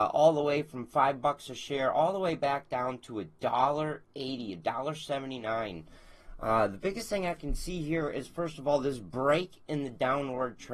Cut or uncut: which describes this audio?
uncut